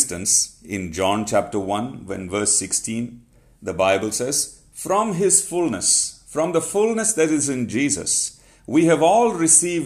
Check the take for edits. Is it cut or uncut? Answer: uncut